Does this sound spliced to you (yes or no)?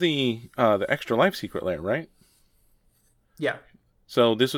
no